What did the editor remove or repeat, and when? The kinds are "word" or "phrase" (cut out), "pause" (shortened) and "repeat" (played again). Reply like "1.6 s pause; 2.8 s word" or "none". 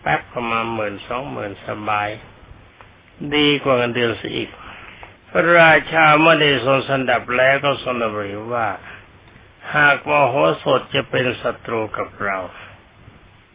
5.2 s pause